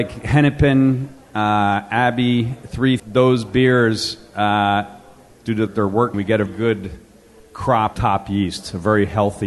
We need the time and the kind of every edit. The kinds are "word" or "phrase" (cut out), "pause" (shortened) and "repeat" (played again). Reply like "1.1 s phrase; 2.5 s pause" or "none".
3.0 s word; 5.7 s word; 6.1 s word; 6.5 s word; 7.9 s word